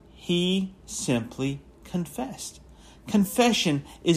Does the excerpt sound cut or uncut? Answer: uncut